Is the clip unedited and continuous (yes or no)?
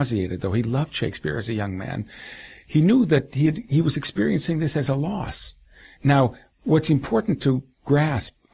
yes